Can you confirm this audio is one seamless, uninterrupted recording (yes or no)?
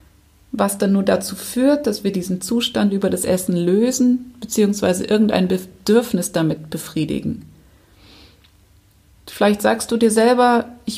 yes